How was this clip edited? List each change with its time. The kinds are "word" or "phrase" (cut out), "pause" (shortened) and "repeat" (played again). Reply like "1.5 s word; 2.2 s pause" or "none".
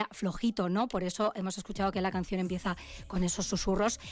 none